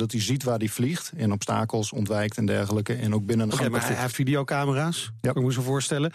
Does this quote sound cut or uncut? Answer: cut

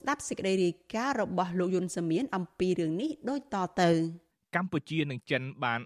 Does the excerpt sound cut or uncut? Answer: cut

